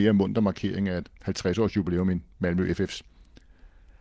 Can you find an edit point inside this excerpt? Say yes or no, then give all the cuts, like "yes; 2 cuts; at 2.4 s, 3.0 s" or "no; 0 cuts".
no; 0 cuts